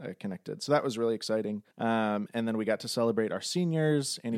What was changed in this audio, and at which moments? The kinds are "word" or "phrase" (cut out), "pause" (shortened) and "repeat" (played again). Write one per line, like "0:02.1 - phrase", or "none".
0:01.7 - pause